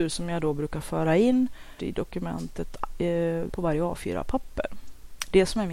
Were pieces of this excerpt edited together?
yes; 2 cuts; at 1.8 s, 3.5 s

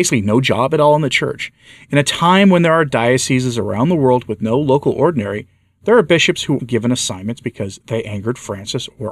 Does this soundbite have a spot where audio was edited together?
yes; 1 cut; at 6.6 s

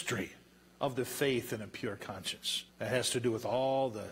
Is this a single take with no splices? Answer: no; 1 cut; at 2.7 s

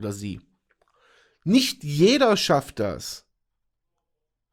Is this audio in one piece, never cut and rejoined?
yes; 0 cuts

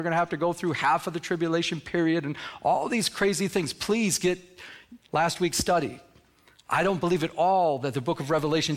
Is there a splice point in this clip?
no; 0 cuts

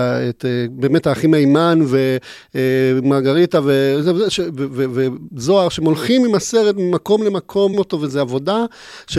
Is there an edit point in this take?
yes; 1 cut; at 7.7 s

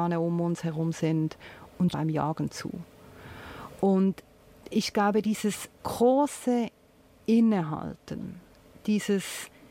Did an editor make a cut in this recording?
yes; 3 cuts; at 1.9 s, 4.4 s, 5.8 s

